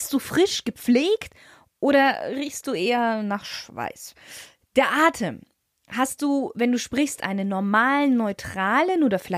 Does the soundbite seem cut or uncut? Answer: uncut